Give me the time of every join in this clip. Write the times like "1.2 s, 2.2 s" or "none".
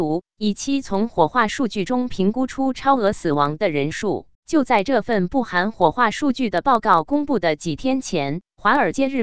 4.3 s